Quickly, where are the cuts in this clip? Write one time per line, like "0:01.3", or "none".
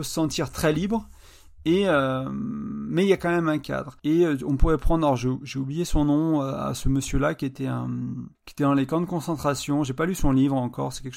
0:04.0
0:08.3